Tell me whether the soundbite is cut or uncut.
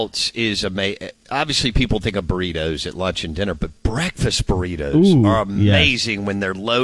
uncut